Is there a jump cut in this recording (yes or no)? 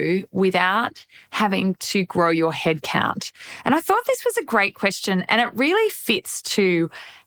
no